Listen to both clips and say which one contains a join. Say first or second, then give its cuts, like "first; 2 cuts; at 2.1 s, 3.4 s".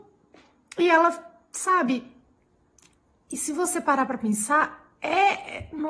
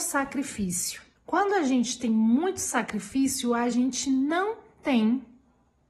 second; 1 cut; at 1.2 s